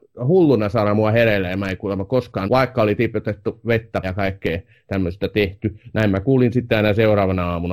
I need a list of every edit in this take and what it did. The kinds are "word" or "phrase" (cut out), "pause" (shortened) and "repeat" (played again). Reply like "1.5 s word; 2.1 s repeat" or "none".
2.5 s word; 4.0 s word